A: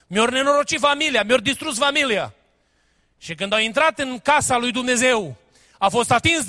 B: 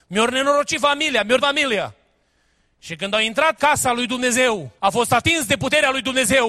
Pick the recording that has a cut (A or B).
B